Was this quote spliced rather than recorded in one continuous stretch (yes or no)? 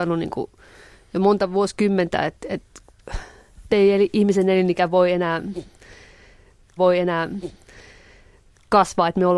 yes